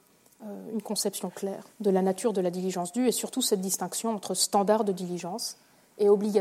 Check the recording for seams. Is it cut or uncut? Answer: cut